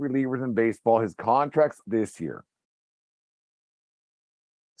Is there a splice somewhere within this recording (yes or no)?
yes